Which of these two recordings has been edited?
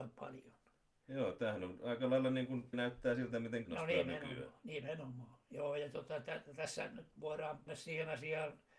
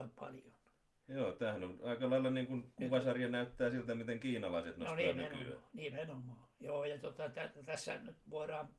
first; 3 cuts; at 2.7 s, 3.6 s, 7.7 s

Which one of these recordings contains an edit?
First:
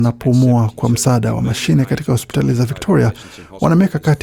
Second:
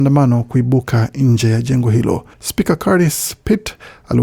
second; 1 cut; at 2.3 s

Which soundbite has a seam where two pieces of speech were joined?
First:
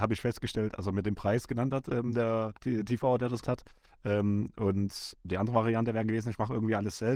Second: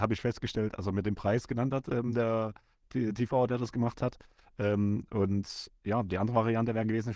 first; 3 cuts; at 2.6 s, 3.4 s, 5.2 s

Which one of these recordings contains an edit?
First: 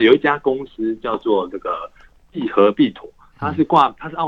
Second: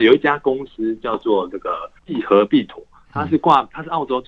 second; 1 cut; at 2.0 s

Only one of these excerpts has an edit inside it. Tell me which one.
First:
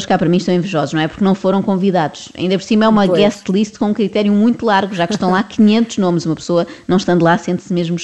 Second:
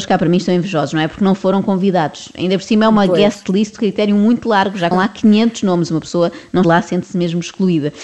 second; 3 cuts; at 3.8 s, 4.9 s, 6.6 s

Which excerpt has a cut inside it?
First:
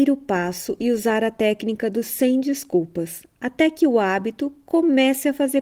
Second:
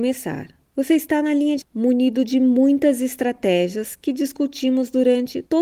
second; 1 cut; at 1.6 s

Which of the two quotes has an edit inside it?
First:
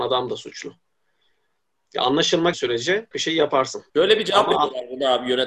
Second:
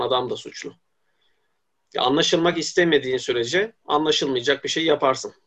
first; 3 cuts; at 2.5 s, 3.1 s, 3.9 s

